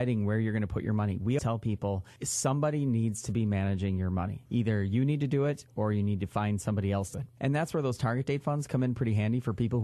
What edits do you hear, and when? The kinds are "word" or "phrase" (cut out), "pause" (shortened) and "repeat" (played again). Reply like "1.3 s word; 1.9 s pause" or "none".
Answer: 1.4 s word; 7.1 s word